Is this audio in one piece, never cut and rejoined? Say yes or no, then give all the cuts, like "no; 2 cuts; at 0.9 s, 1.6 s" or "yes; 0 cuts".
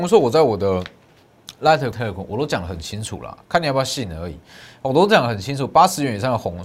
no; 1 cut; at 1.9 s